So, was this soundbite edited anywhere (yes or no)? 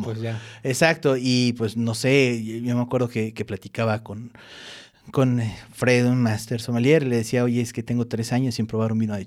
no